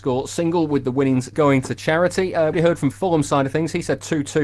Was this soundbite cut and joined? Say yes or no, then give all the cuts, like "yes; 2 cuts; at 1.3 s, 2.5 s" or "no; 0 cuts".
yes; 2 cuts; at 2.5 s, 2.9 s